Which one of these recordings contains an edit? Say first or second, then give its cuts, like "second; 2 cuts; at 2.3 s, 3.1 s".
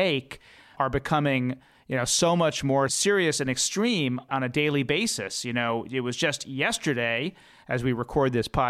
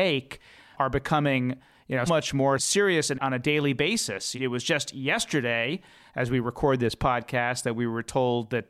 second; 3 cuts; at 2.1 s, 3.1 s, 4.3 s